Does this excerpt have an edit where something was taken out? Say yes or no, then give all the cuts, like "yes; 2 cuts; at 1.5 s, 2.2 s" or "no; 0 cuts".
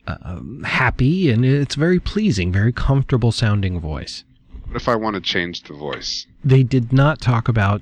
yes; 1 cut; at 6.4 s